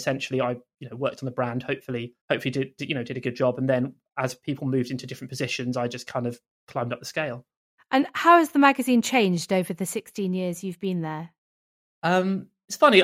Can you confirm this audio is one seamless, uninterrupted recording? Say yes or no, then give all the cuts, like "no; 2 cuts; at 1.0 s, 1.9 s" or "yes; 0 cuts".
no; 2 cuts; at 2.2 s, 7.7 s